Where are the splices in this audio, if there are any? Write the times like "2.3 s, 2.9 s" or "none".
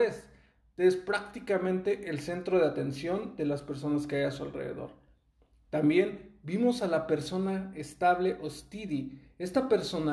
none